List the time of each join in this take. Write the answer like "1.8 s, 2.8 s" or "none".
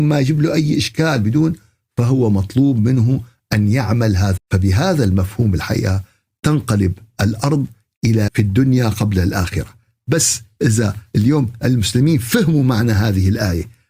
4.4 s, 8.3 s